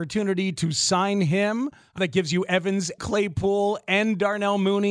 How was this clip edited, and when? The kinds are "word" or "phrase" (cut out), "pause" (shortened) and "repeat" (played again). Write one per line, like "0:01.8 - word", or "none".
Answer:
0:02.0 - word
0:03.0 - word